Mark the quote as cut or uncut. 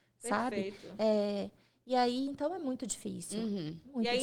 uncut